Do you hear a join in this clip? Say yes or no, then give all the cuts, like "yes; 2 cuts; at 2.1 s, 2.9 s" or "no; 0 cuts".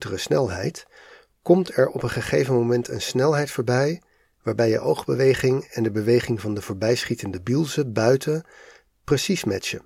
no; 0 cuts